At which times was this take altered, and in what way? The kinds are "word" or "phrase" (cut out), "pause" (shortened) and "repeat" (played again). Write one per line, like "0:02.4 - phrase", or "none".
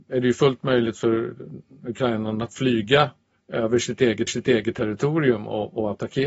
0:04.3 - repeat